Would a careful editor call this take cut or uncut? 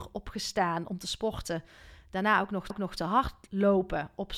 cut